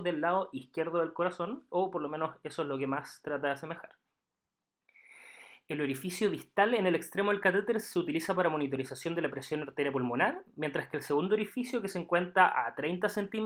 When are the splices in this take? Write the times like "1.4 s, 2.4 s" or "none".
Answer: none